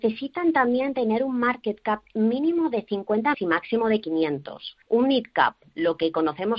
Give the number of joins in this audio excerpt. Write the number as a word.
two